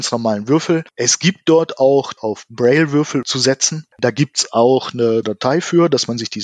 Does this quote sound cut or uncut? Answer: cut